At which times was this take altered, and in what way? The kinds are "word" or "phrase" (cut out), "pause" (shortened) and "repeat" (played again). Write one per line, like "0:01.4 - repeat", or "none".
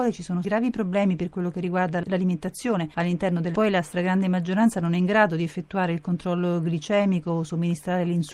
0:03.5 - word